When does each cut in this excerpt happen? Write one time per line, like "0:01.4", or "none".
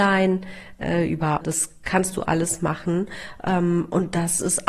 0:01.4